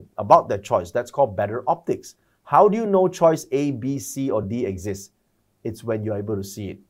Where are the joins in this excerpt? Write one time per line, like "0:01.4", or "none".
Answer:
none